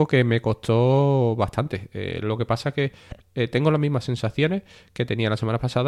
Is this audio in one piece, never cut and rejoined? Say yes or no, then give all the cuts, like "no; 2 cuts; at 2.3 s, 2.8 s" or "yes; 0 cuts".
yes; 0 cuts